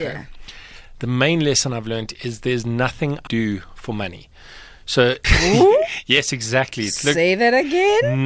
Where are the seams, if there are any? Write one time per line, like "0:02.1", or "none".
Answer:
0:03.3
0:05.2